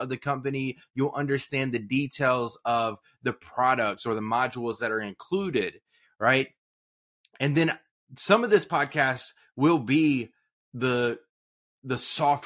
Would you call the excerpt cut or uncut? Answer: uncut